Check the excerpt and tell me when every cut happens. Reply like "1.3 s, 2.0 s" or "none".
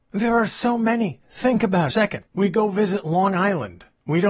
1.9 s, 2.3 s

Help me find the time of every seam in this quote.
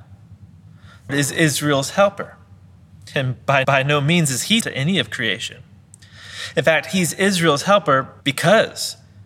1.1 s, 3.6 s, 4.6 s, 8.2 s

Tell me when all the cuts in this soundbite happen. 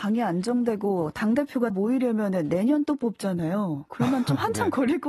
1.7 s, 2.8 s

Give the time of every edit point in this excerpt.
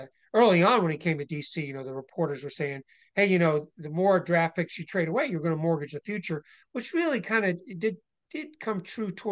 none

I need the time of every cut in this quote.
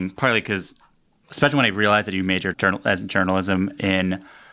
2.5 s

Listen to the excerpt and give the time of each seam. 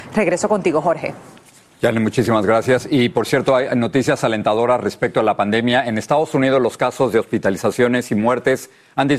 none

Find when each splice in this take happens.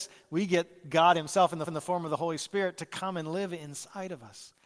1.7 s

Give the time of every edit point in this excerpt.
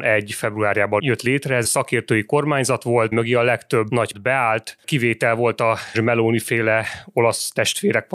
1.6 s, 3.1 s, 4.1 s, 5.9 s

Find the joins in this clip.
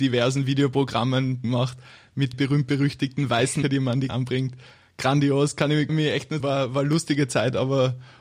1.4 s, 2.3 s, 3.6 s, 4.1 s, 5.9 s, 6.4 s

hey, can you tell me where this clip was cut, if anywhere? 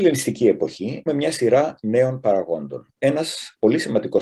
1.1 s

